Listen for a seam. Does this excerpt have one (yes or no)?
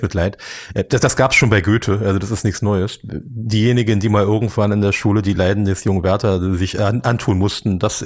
no